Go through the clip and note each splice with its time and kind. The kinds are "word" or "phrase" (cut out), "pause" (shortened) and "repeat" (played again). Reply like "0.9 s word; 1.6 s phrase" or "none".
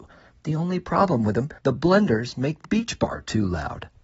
1.6 s pause; 2.6 s word